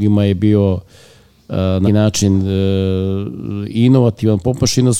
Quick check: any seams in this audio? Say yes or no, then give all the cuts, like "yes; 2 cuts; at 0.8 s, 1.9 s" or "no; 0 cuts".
yes; 1 cut; at 1.8 s